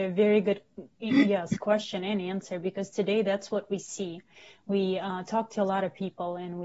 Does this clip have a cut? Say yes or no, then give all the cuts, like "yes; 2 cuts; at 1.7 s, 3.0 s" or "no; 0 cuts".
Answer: no; 0 cuts